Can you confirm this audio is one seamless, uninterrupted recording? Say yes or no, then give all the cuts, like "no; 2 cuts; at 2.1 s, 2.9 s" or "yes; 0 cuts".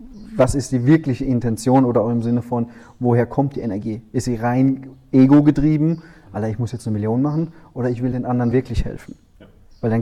yes; 0 cuts